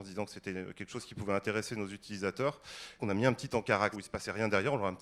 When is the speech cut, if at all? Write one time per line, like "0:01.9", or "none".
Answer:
0:03.0
0:03.9